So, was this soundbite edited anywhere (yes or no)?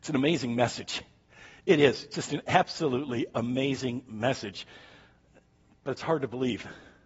no